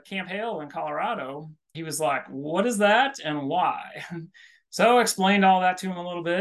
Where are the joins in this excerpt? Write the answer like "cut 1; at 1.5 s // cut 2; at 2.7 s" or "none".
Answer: cut 1; at 1.7 s